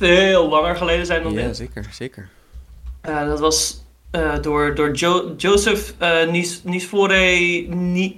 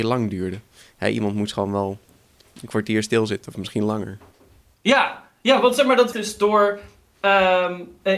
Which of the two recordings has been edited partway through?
second; 1 cut; at 6.1 s

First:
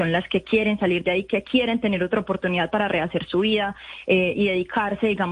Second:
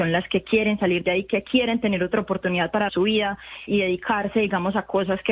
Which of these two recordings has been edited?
second; 2 cuts; at 2.9 s, 3.7 s

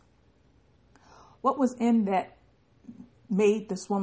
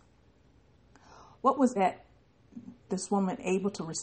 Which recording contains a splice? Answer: second; 2 cuts; at 1.8 s, 2.9 s

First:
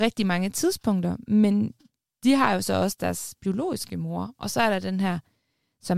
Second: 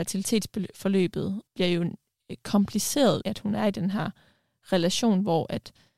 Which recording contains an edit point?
second; 2 cuts; at 1.5 s, 3.2 s

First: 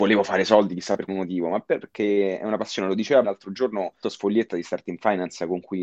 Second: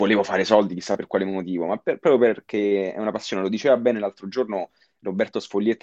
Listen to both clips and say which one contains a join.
first; 4 cuts; at 1.1 s, 1.8 s, 3.2 s, 4.0 s

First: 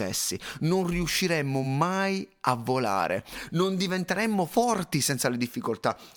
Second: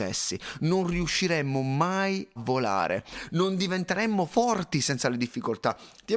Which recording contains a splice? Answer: second; 1 cut; at 2.4 s

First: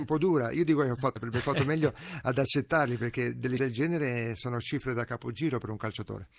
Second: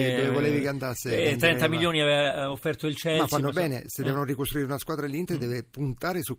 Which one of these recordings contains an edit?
first; 2 cuts; at 1.2 s, 3.6 s

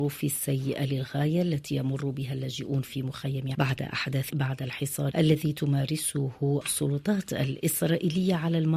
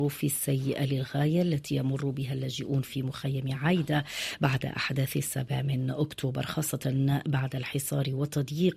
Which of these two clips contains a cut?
first; 3 cuts; at 3.5 s, 4.3 s, 5.1 s

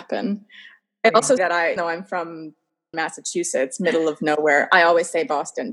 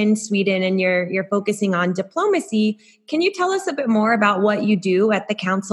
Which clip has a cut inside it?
first; 3 cuts; at 1.4 s, 1.8 s, 2.9 s

